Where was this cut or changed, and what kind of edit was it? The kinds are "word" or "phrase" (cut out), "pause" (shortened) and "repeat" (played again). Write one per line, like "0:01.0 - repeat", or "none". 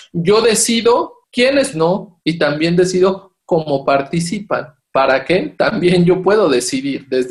0:01.7 - phrase